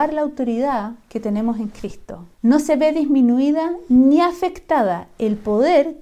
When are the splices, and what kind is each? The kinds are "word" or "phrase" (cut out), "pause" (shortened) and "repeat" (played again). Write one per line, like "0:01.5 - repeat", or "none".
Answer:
0:02.3 - pause